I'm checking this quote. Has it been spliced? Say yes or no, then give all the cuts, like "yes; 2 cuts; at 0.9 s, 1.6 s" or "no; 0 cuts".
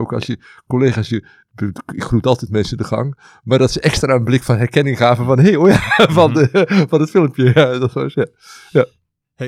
no; 0 cuts